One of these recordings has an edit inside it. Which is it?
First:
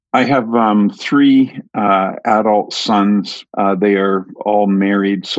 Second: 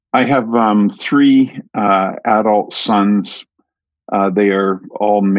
first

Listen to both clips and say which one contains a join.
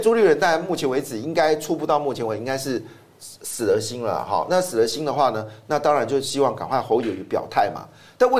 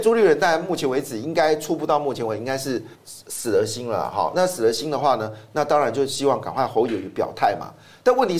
second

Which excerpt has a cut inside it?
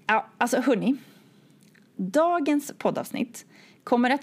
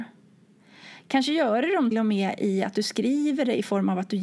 second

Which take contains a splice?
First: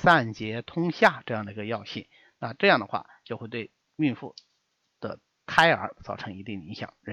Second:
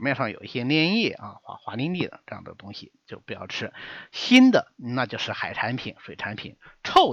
first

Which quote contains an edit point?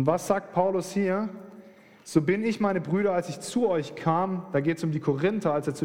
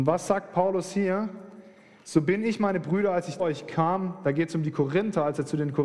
second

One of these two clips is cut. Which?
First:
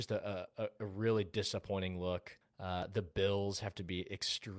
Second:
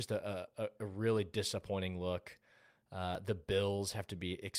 first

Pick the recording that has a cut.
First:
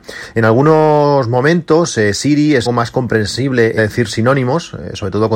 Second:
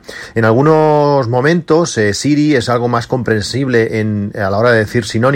first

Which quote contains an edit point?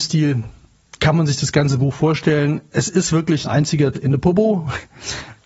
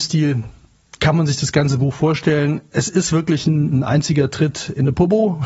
first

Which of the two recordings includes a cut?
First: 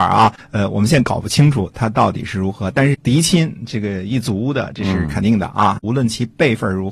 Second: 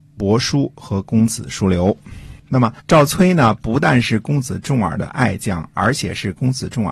second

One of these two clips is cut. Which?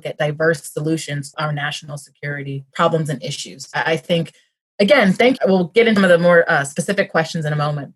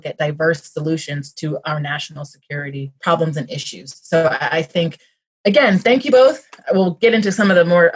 first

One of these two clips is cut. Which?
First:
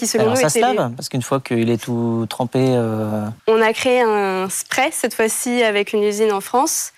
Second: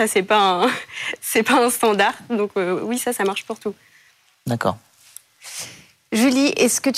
first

